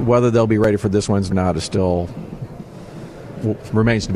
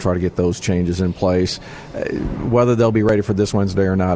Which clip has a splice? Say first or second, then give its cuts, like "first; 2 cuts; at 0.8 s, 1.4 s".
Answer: first; 1 cut; at 1.3 s